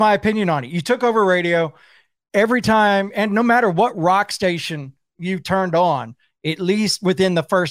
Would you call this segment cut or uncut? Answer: uncut